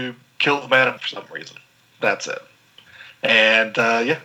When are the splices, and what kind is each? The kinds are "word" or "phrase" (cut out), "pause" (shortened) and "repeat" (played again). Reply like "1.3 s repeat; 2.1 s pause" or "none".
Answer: 1.0 s word